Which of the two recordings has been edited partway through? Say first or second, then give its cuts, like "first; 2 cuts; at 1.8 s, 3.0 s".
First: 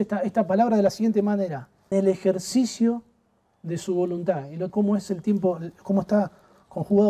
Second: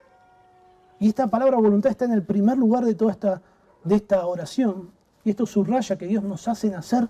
first; 2 cuts; at 1.9 s, 4.7 s